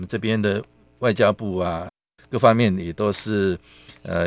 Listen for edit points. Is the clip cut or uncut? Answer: cut